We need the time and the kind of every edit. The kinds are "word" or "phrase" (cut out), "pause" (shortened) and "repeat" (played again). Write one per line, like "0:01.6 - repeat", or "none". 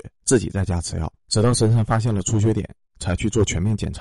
0:01.2 - pause